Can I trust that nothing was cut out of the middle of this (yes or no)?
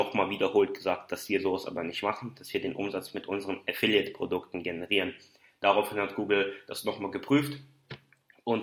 yes